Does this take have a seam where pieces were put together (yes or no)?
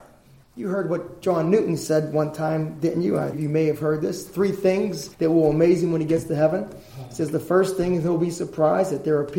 yes